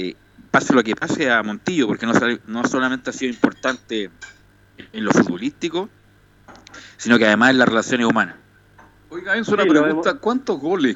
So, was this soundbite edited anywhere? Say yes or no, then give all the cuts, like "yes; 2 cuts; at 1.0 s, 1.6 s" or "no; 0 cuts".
no; 0 cuts